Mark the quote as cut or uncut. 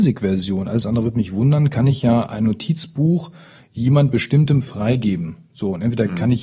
uncut